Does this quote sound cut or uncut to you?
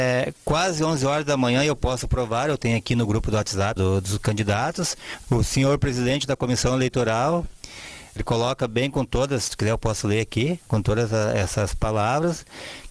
cut